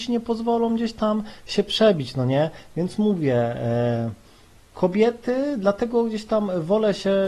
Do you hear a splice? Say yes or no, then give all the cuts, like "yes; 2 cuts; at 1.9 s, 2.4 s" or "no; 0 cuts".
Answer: no; 0 cuts